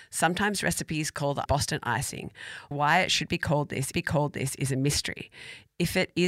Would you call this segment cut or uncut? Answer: cut